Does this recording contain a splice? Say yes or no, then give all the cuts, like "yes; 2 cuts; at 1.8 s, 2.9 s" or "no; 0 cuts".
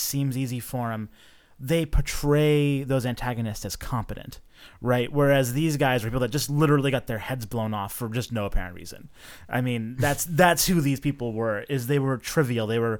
no; 0 cuts